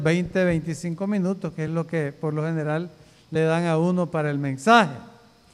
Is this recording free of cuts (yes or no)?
yes